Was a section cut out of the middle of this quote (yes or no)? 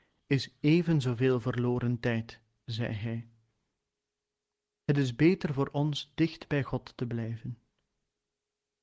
no